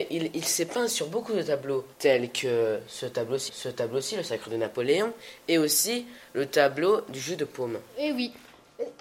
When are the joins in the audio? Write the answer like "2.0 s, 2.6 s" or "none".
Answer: 1.9 s, 3.5 s